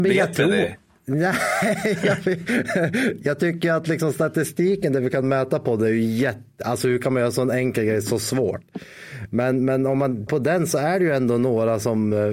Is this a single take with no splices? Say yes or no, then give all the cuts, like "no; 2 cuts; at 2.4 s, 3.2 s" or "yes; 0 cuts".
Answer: no; 1 cut; at 10.3 s